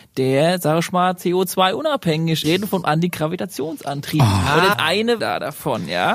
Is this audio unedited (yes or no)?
no